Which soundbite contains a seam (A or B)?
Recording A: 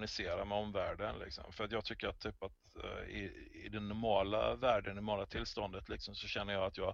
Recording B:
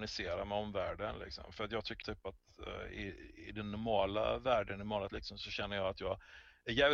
B